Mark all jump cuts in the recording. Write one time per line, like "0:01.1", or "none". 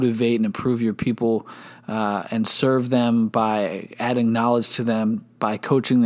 none

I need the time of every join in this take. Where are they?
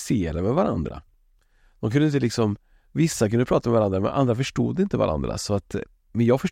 none

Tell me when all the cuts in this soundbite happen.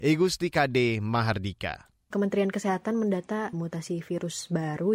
0:03.5

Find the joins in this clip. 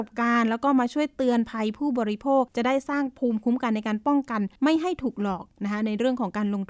0:02.5
0:04.6

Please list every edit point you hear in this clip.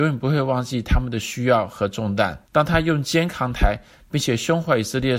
0:02.5

